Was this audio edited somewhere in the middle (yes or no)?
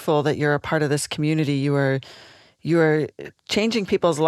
no